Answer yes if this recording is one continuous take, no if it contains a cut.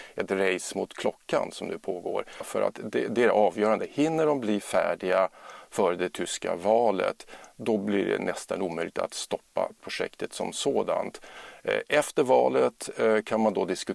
yes